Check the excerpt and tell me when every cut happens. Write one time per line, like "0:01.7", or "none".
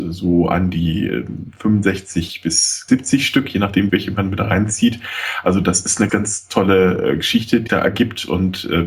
0:02.9
0:03.9
0:06.1
0:07.7